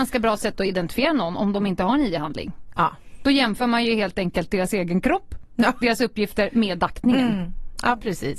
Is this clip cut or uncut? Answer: cut